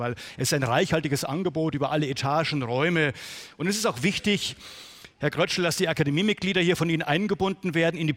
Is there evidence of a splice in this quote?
no; 0 cuts

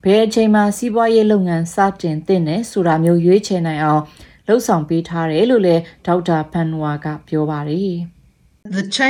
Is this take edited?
no; 0 cuts

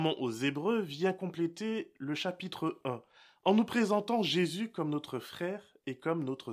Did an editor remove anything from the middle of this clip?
no; 0 cuts

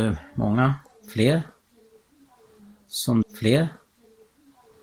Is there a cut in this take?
yes; 1 cut; at 3.2 s

